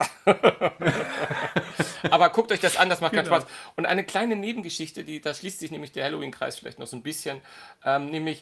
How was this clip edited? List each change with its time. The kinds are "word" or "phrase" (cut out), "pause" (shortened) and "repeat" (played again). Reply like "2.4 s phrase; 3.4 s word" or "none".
none